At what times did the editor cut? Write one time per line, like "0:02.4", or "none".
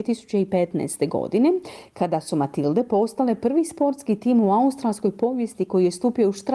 none